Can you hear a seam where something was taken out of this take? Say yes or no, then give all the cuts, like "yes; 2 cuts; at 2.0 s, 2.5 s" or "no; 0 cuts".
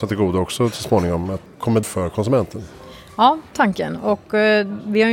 yes; 2 cuts; at 1.8 s, 3.5 s